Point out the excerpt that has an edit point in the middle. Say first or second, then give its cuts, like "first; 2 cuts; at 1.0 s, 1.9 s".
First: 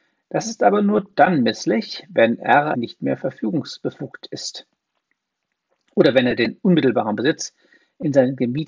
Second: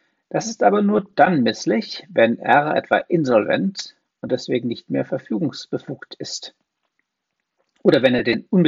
first; 1 cut; at 2.7 s